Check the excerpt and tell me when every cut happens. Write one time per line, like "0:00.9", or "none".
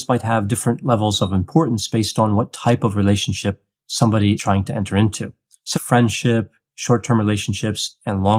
0:04.4
0:05.7